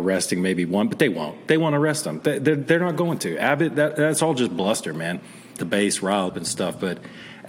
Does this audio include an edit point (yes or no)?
yes